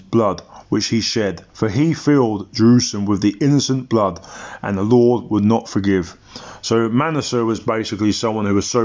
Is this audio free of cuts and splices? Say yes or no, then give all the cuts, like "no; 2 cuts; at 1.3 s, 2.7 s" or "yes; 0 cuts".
no; 1 cut; at 1.5 s